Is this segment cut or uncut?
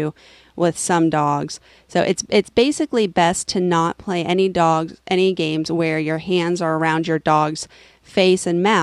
uncut